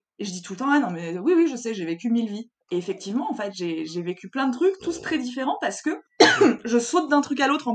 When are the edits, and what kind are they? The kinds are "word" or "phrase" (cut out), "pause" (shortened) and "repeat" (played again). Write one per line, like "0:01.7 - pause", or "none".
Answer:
0:02.6 - pause
0:06.1 - pause